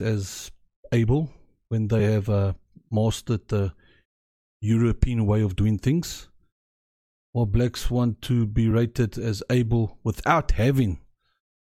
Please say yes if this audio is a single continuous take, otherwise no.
yes